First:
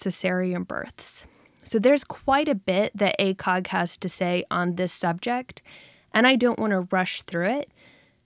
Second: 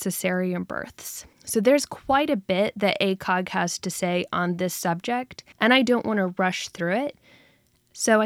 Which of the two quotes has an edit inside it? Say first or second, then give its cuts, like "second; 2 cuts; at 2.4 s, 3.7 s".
second; 2 cuts; at 1.3 s, 5.5 s